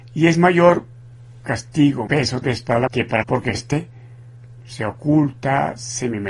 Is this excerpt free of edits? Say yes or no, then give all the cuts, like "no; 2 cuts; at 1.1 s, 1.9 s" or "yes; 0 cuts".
no; 5 cuts; at 2.1 s, 2.4 s, 2.9 s, 3.2 s, 3.5 s